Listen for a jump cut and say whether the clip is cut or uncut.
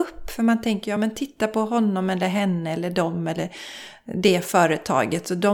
uncut